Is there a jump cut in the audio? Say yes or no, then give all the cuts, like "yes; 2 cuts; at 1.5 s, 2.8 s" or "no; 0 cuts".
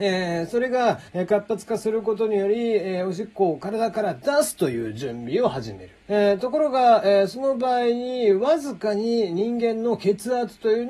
yes; 2 cuts; at 1.1 s, 6.0 s